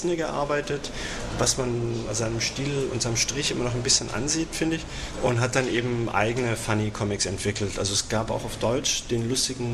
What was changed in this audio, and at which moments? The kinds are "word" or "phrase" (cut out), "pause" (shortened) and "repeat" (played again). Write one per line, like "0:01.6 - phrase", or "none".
none